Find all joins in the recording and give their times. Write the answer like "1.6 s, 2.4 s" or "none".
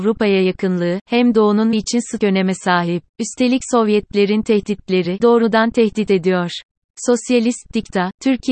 1.3 s, 1.7 s, 2.2 s, 3.1 s, 5.2 s

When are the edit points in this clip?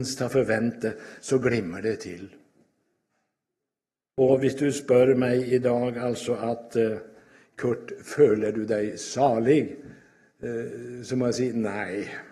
none

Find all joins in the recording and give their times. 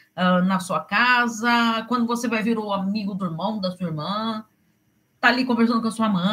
2.4 s, 3.2 s

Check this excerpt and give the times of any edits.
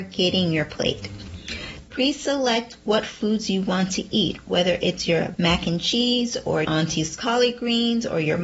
5.4 s, 6.6 s

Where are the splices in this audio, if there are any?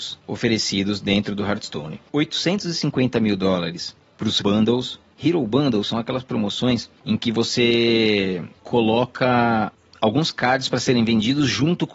2.1 s, 4.4 s

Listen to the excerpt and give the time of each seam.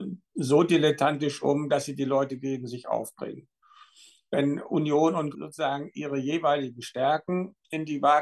5.3 s

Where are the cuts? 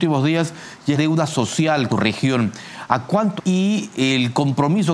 0.9 s, 1.9 s, 3.4 s

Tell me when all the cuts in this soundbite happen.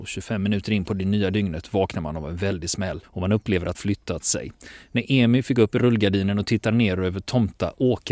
3.0 s, 3.7 s

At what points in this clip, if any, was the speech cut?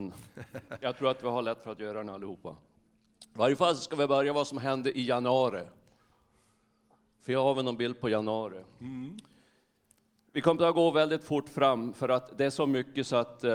none

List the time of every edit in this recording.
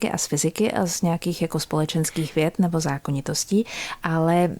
none

